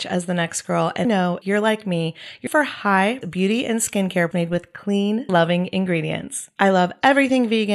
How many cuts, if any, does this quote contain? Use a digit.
6